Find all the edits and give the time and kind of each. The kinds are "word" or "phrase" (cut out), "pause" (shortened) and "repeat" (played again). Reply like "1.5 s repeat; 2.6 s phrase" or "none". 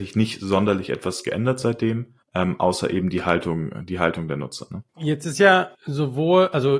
2.2 s pause; 4.9 s pause; 5.7 s pause